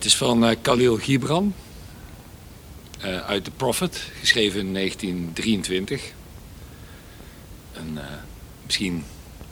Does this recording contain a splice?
no; 0 cuts

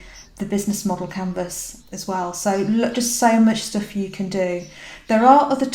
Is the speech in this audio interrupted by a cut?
no; 0 cuts

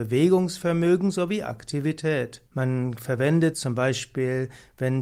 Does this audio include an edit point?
yes; 2 cuts; at 2.5 s, 3.5 s

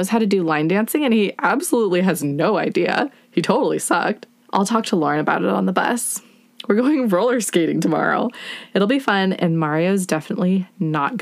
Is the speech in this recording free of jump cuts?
yes; 0 cuts

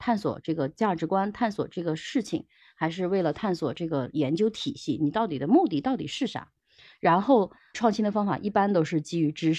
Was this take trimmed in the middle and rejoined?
no; 0 cuts

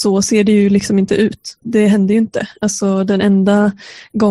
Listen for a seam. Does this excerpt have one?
no; 0 cuts

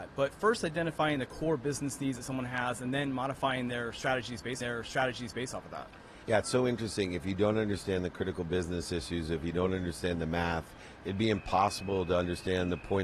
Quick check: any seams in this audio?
yes; 2 cuts; at 4.6 s, 6.2 s

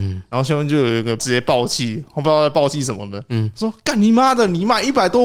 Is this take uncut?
yes; 0 cuts

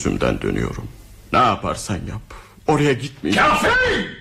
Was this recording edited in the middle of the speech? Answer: yes; 1 cut; at 1.2 s

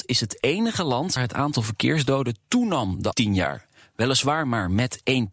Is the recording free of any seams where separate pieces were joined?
no; 2 cuts; at 1.2 s, 3.1 s

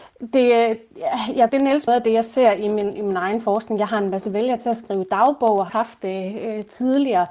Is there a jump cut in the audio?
yes; 3 cuts; at 1.5 s, 1.9 s, 5.7 s

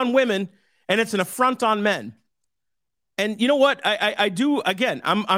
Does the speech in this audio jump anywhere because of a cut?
no; 0 cuts

